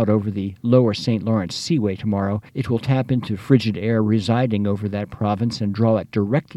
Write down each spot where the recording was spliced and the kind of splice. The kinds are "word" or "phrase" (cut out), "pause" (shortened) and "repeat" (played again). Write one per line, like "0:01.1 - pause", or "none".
0:02.5 - pause